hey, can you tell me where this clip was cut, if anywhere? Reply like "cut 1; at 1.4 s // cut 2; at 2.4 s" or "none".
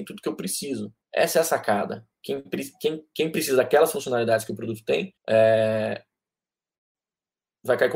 cut 1; at 1.0 s // cut 2; at 5.2 s